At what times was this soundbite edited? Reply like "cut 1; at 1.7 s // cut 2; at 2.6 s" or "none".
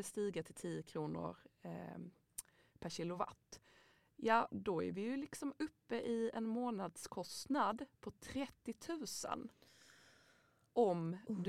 none